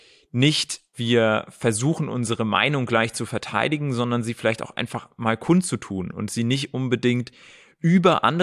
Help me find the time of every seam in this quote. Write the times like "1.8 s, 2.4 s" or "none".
0.9 s